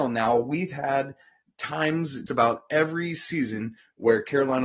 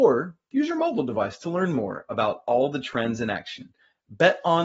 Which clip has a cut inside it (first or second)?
first